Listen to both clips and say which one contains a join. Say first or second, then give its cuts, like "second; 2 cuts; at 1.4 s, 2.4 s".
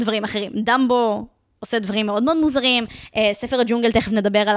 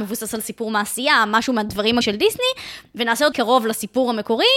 second; 2 cuts; at 2.0 s, 3.3 s